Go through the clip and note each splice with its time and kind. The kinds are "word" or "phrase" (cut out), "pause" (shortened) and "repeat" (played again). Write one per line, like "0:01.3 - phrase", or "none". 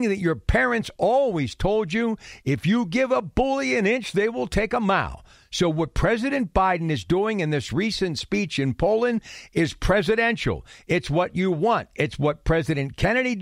none